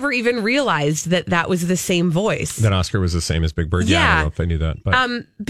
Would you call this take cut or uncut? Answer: uncut